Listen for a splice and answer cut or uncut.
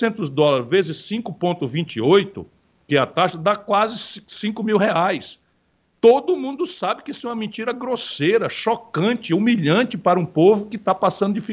uncut